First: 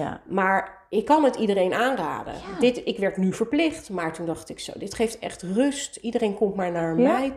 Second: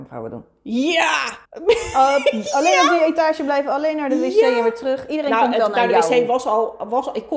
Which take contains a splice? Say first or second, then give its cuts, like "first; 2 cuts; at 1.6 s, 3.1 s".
second; 1 cut; at 1.4 s